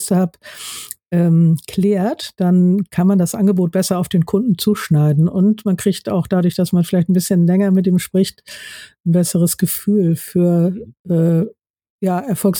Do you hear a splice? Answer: no; 0 cuts

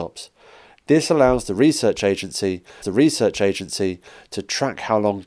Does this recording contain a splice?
yes; 1 cut; at 2.8 s

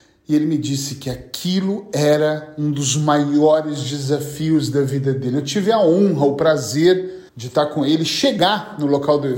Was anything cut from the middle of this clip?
yes; 1 cut; at 7.3 s

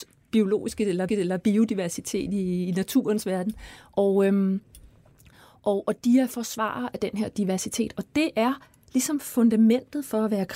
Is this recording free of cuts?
no; 1 cut; at 1.1 s

